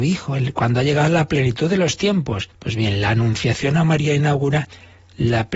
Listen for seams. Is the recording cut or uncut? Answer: cut